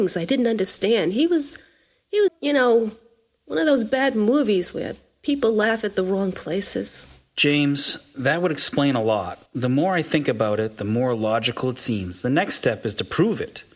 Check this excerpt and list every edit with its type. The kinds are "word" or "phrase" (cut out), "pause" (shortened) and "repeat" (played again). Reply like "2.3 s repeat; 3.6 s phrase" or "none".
2.3 s word; 9.5 s pause